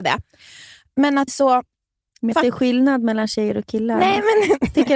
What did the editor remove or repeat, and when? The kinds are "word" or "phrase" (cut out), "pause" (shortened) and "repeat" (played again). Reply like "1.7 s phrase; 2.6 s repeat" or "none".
1.3 s phrase; 2.3 s word